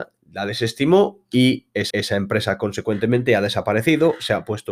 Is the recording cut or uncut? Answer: cut